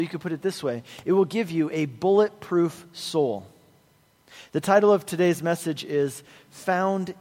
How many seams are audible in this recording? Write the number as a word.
zero